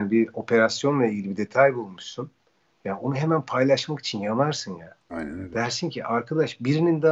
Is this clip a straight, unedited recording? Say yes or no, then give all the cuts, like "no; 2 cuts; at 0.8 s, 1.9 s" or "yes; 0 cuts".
yes; 0 cuts